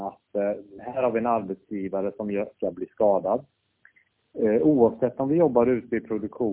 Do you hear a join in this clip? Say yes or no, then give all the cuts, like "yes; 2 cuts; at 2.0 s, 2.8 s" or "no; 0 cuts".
yes; 1 cut; at 2.5 s